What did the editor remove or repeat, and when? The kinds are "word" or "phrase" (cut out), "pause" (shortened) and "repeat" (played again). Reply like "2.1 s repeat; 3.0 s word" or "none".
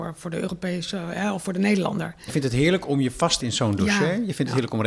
2.3 s word; 3.4 s word